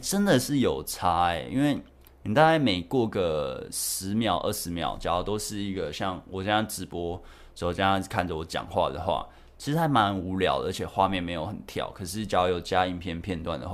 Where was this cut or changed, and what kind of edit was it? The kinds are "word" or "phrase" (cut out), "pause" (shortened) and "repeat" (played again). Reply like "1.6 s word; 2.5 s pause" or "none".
none